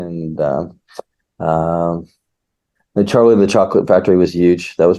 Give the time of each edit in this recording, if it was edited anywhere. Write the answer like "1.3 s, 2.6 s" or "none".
none